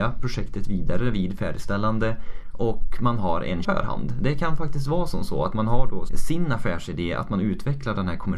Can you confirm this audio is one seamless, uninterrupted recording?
no; 2 cuts; at 3.6 s, 6.1 s

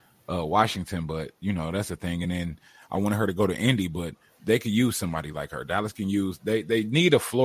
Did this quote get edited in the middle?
no; 0 cuts

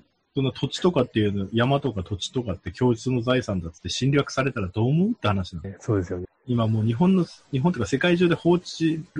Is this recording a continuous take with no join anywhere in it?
yes; 0 cuts

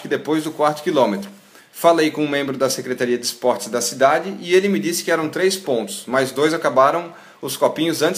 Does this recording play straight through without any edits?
yes; 0 cuts

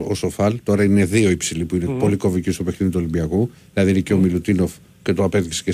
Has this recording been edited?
no; 0 cuts

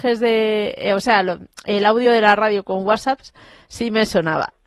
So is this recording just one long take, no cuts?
yes; 0 cuts

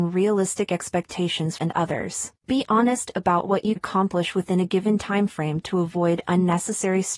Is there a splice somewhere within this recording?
yes; 3 cuts; at 1.6 s, 2.4 s, 3.8 s

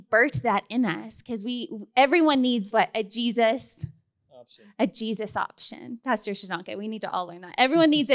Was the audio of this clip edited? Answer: no; 0 cuts

